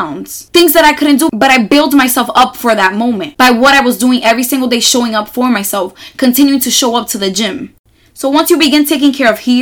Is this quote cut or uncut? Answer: uncut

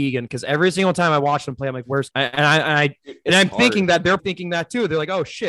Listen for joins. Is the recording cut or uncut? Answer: cut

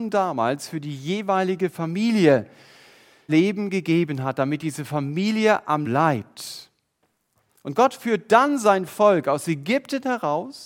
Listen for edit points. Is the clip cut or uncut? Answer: cut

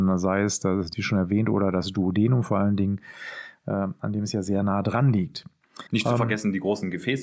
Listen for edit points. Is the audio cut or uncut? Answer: cut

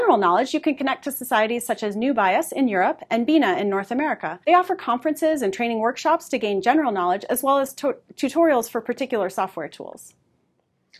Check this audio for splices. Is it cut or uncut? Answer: cut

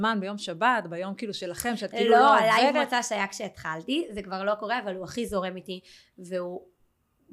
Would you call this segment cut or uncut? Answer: uncut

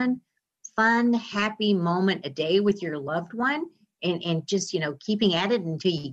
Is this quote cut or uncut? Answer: uncut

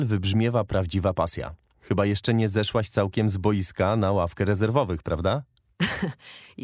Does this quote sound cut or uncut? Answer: uncut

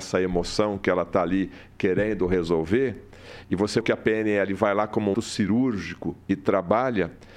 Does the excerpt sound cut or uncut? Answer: cut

